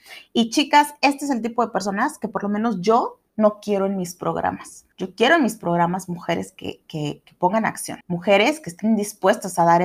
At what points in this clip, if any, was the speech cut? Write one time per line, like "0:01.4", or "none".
0:03.3
0:04.9
0:08.0